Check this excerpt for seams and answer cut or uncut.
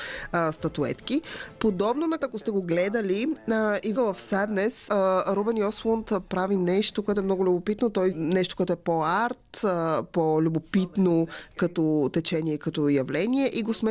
cut